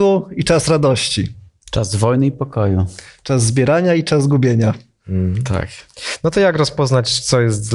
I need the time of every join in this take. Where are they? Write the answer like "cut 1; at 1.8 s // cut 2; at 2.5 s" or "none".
none